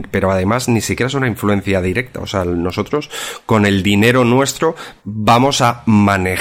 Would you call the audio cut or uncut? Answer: cut